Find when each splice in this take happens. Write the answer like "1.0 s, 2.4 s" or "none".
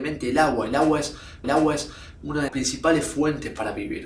1.4 s, 2.5 s